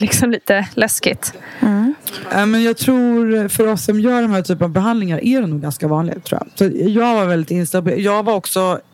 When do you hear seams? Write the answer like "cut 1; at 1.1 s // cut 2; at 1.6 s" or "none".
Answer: none